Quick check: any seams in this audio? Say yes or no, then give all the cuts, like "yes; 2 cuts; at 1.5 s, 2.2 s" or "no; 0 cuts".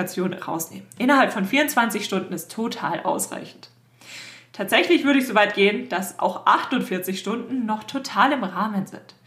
no; 0 cuts